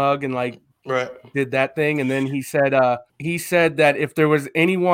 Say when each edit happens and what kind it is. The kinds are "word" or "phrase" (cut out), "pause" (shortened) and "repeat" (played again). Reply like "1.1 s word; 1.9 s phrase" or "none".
3.1 s pause